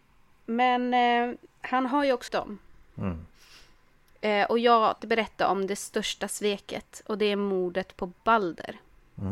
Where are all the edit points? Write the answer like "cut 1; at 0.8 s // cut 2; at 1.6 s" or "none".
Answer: cut 1; at 2.3 s // cut 2; at 5.0 s